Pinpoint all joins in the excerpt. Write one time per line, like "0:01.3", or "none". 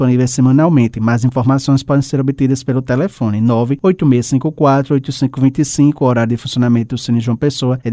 none